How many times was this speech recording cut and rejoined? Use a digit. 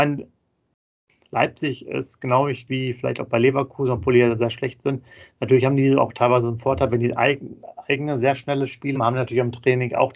2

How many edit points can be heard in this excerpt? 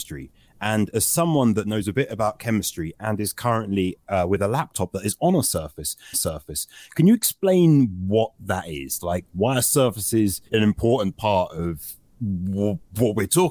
2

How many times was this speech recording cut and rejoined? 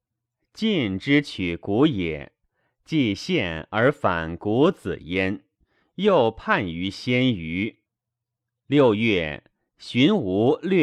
0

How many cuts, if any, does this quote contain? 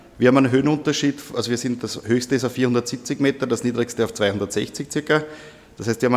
0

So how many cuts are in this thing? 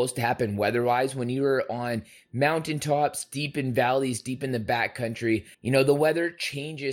1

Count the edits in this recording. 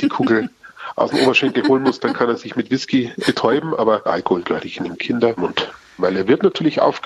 1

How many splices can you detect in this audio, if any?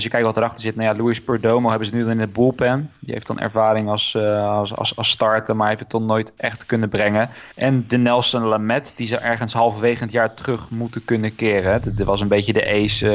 1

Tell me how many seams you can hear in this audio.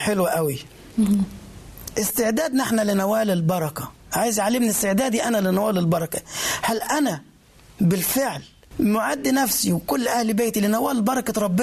0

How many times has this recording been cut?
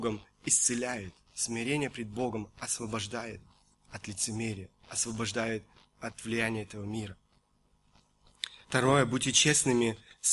4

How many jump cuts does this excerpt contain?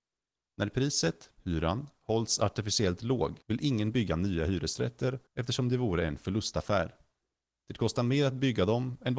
2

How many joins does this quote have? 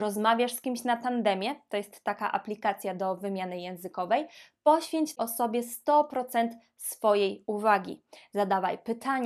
1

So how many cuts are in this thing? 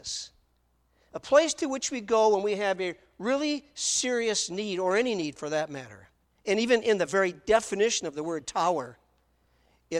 1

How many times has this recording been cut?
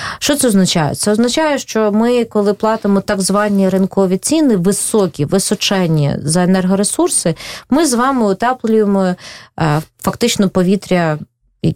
0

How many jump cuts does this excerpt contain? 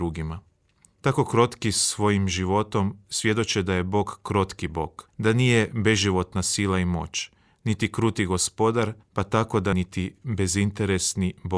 3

